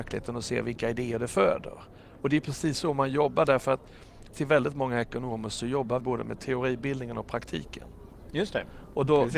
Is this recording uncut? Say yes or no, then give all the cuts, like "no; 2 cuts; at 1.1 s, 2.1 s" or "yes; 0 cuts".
no; 2 cuts; at 4.3 s, 6.0 s